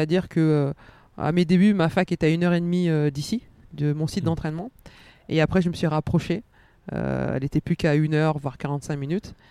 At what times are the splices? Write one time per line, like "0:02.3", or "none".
none